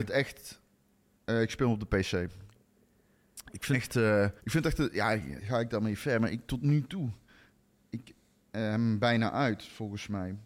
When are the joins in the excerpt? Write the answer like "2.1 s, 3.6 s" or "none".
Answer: 3.7 s, 4.4 s, 5.4 s